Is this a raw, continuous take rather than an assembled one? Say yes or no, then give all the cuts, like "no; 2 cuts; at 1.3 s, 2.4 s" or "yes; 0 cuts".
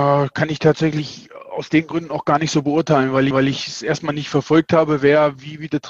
no; 1 cut; at 3.3 s